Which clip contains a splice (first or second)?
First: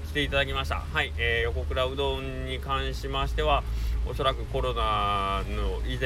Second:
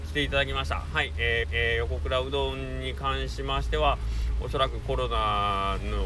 second